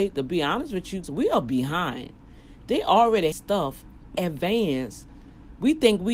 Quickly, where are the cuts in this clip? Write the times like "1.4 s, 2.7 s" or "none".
1.0 s, 3.3 s, 4.1 s